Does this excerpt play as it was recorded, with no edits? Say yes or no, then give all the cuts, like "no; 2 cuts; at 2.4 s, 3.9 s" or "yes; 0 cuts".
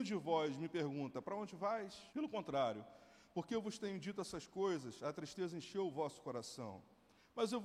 no; 1 cut; at 2.1 s